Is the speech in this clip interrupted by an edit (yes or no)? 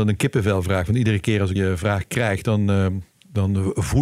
yes